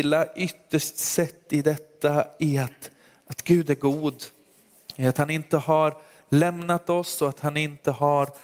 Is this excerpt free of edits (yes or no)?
yes